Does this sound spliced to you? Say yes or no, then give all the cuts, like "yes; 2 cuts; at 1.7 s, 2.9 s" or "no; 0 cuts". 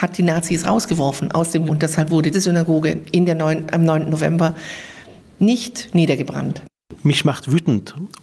yes; 2 cuts; at 1.7 s, 2.3 s